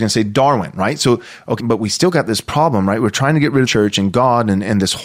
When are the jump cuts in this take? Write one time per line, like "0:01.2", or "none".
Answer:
0:01.6
0:03.7